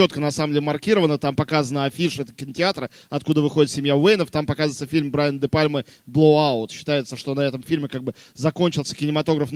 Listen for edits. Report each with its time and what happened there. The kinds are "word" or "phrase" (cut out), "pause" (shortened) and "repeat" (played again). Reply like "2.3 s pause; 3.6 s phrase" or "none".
none